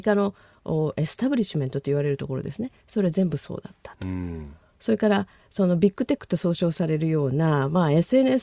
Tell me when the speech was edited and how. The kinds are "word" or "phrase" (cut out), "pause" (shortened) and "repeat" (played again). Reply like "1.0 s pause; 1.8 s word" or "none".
none